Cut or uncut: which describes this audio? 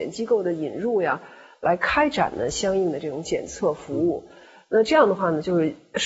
uncut